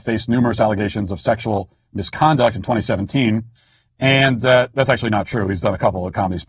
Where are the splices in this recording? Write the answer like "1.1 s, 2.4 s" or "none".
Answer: 3.6 s